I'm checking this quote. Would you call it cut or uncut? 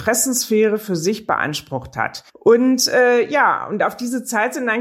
cut